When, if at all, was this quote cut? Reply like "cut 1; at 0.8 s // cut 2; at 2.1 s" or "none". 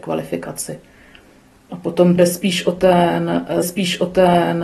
cut 1; at 2.2 s // cut 2; at 3.6 s